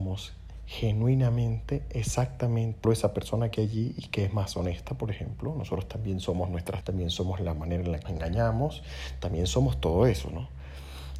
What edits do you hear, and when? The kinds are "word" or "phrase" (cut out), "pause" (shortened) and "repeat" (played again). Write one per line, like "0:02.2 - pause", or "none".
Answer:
0:02.8 - word
0:03.6 - word
0:06.8 - word
0:08.0 - word